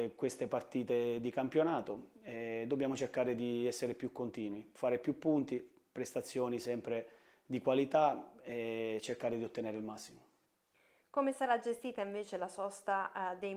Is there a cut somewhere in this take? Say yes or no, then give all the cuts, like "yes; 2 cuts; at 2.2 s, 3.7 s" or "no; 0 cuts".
no; 0 cuts